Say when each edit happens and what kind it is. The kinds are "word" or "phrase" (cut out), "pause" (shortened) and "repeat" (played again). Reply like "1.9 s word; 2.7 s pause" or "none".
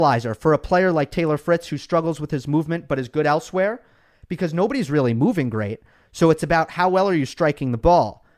none

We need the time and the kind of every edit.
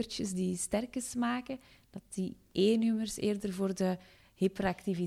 none

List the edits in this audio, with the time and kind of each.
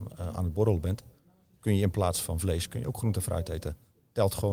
none

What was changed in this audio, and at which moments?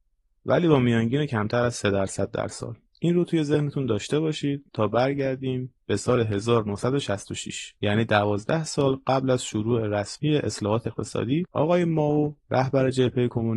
2.9 s pause; 4.7 s pause; 5.8 s pause; 7.8 s pause

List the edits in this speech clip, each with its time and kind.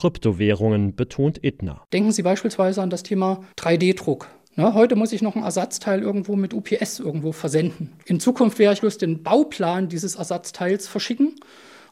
3.5 s pause; 8.8 s word

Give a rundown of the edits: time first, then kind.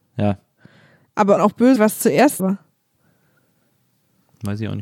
1.4 s word; 1.8 s phrase; 2.4 s word

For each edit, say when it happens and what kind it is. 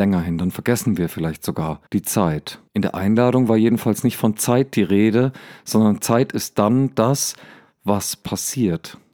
1.9 s pause; 2.7 s pause

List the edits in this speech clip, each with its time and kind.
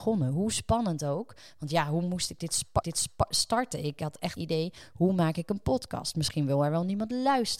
2.8 s repeat; 4.4 s word

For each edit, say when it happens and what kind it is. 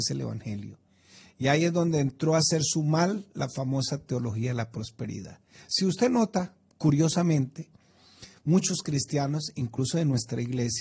none

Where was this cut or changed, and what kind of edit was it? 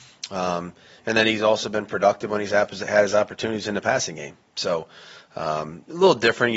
none

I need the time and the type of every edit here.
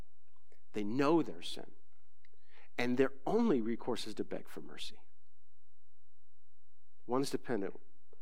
none

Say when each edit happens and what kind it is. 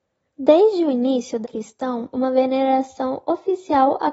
1.4 s word; 2.1 s word

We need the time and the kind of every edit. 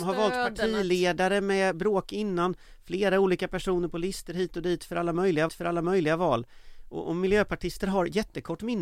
1.7 s word; 5.5 s repeat

